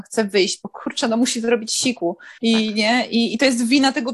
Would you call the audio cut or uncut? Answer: cut